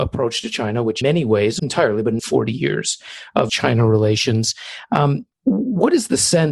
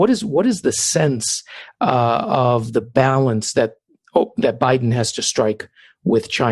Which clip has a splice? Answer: first; 5 cuts; at 1.0 s, 1.6 s, 2.2 s, 3.5 s, 5.3 s

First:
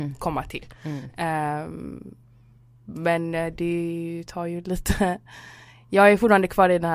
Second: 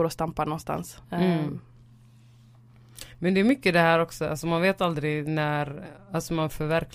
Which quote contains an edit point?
second; 1 cut; at 1.0 s

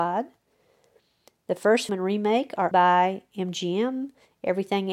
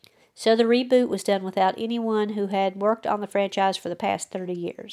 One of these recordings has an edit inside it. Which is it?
first; 2 cuts; at 1.9 s, 2.7 s

